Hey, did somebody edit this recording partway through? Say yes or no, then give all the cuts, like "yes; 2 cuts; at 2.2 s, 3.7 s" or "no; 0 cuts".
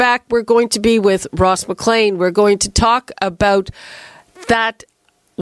no; 0 cuts